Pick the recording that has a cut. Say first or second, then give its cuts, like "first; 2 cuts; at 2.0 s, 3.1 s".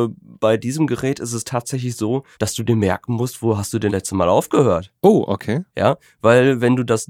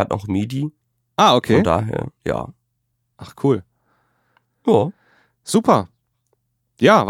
first; 4 cuts; at 2.3 s, 3.9 s, 5.0 s, 5.7 s